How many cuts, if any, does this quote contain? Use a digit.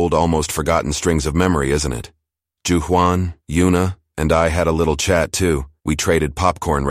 2